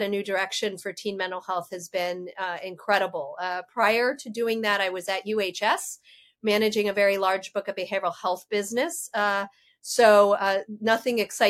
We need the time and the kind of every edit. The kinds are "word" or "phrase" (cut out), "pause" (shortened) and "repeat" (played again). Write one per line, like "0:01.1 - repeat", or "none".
none